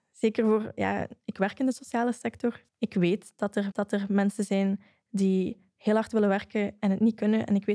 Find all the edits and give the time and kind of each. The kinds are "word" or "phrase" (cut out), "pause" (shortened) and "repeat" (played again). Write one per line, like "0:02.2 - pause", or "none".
0:02.7 - pause
0:03.7 - repeat